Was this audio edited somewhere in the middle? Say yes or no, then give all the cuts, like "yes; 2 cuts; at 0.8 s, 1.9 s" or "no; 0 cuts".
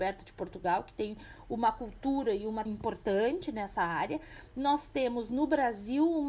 yes; 1 cut; at 2.7 s